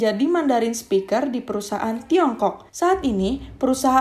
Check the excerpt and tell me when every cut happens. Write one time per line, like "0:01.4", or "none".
0:02.7